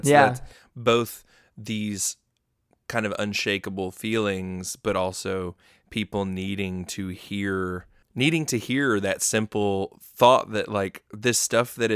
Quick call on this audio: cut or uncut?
uncut